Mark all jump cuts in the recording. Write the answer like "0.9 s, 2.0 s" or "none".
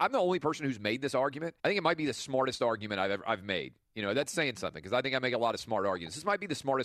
1.6 s

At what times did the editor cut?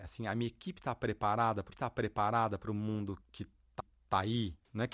1.7 s, 3.2 s, 3.8 s

